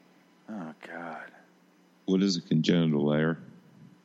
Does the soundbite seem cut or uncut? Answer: uncut